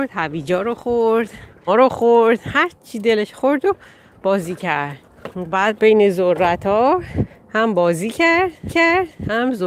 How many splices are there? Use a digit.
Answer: 5